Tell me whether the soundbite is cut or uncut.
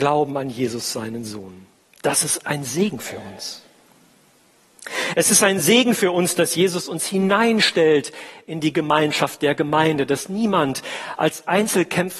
uncut